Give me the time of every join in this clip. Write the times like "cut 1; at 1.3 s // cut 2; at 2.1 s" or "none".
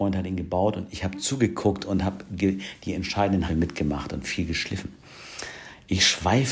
cut 1; at 3.5 s